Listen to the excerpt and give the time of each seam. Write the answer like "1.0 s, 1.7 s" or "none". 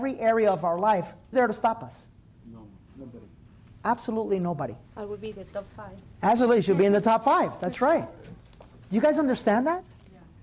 1.3 s, 4.8 s